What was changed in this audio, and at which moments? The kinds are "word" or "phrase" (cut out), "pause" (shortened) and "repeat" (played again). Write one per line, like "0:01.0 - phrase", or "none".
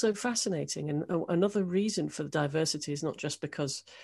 none